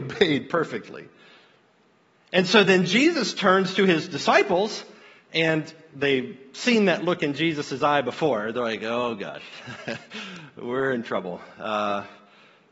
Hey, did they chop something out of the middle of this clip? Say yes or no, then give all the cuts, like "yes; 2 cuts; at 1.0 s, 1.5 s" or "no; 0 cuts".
no; 0 cuts